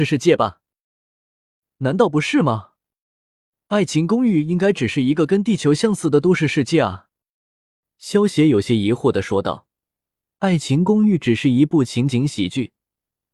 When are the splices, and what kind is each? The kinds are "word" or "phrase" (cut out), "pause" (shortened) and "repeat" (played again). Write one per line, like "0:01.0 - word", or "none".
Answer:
none